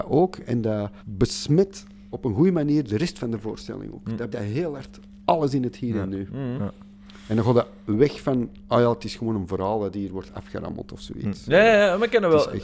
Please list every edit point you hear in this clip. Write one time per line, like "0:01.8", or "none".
0:01.0
0:04.3